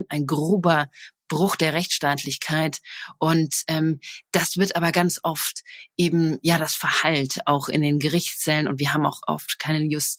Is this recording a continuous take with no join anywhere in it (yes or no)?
yes